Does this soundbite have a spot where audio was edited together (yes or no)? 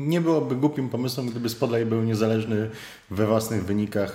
no